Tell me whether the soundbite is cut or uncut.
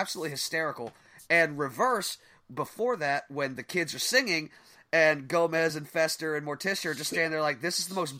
uncut